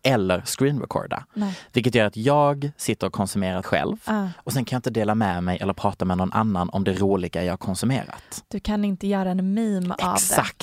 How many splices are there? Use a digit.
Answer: 1